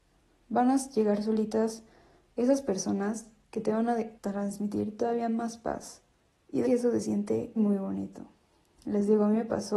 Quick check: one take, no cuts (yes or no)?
no